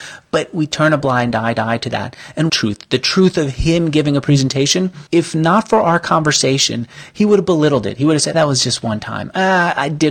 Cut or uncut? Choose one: cut